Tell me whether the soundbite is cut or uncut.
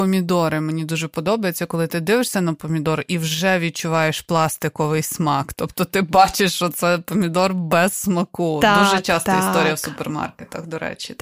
uncut